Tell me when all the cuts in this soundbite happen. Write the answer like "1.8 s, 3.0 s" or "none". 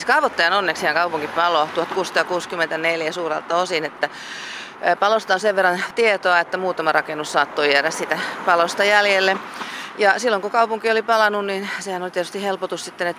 none